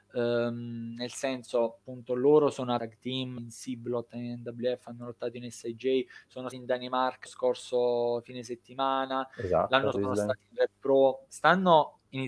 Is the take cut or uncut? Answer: cut